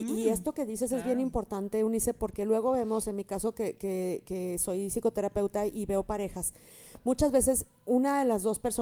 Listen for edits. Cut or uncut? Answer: uncut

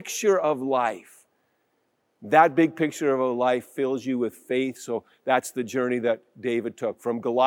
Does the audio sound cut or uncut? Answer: uncut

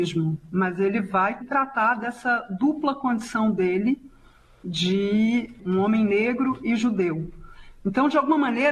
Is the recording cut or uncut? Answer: cut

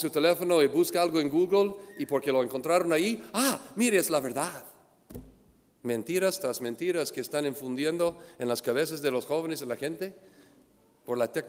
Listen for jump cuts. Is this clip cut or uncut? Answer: uncut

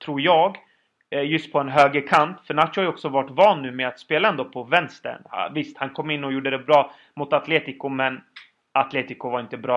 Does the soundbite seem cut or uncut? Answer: uncut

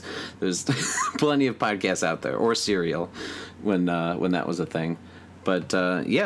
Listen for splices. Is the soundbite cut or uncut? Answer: uncut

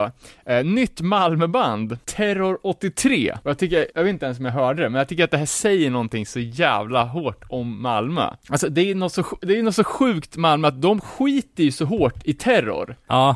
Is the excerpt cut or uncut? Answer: uncut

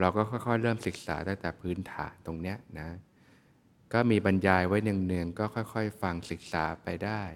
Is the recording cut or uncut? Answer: uncut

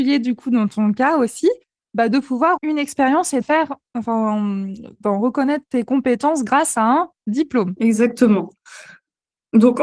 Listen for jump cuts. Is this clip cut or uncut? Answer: cut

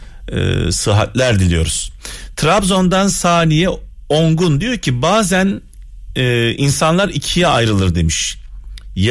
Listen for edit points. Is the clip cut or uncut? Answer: uncut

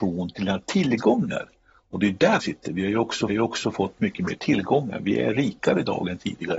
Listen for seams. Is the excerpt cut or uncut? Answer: cut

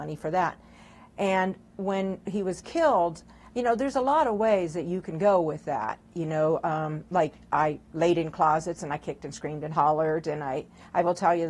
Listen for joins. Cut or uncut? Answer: uncut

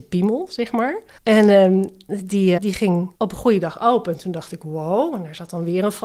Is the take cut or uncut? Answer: cut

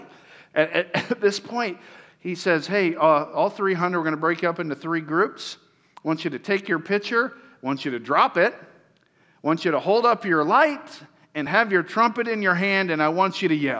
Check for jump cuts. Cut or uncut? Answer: uncut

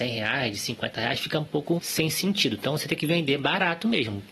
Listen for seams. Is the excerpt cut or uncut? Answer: cut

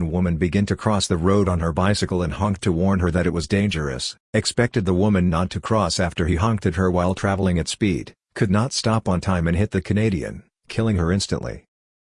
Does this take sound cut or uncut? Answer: cut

